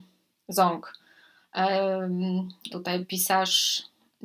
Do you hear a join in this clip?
yes; 2 cuts; at 2.7 s, 3.0 s

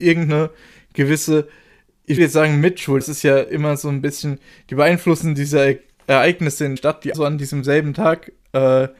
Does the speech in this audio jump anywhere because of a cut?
yes; 4 cuts; at 2.2 s, 3.0 s, 6.8 s, 7.1 s

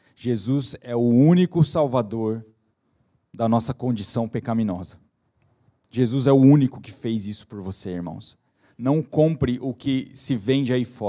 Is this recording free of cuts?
yes; 0 cuts

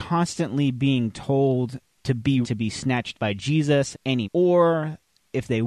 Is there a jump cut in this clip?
yes; 5 cuts; at 2.0 s, 2.4 s, 3.1 s, 3.9 s, 4.2 s

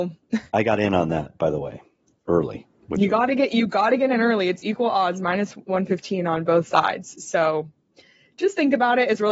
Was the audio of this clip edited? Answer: no; 0 cuts

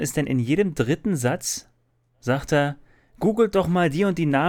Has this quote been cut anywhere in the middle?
no; 0 cuts

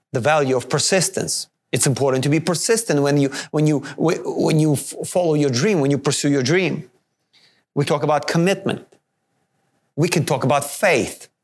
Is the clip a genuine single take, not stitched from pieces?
no; 1 cut; at 7.9 s

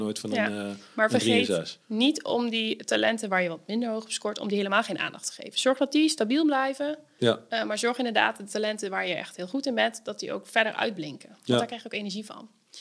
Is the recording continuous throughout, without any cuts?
yes; 0 cuts

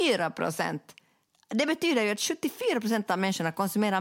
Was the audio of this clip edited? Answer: no; 0 cuts

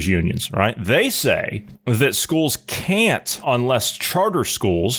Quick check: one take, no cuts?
no; 1 cut; at 3.4 s

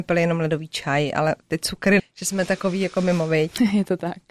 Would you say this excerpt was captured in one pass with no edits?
no; 1 cut; at 2.0 s

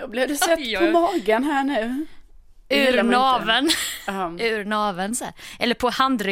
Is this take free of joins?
yes; 0 cuts

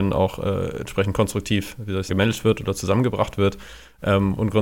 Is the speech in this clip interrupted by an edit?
yes; 1 cut; at 2.1 s

